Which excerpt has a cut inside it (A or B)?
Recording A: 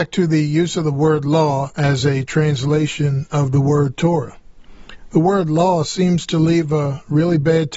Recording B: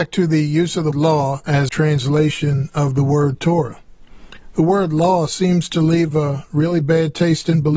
B